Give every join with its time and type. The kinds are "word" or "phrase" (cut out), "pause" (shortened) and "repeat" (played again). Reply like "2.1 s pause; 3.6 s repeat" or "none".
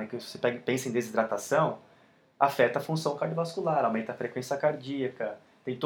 none